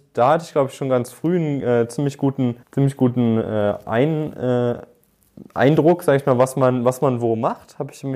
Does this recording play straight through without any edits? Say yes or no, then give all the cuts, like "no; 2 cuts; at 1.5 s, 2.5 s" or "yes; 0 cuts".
no; 1 cut; at 2.6 s